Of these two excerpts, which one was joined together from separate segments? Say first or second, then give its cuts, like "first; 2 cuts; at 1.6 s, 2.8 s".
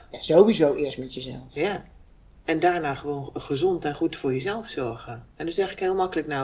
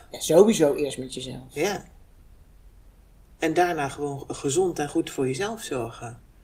first; 2 cuts; at 2.1 s, 5.3 s